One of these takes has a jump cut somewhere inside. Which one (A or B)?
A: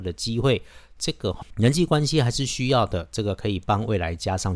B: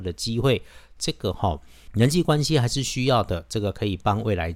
A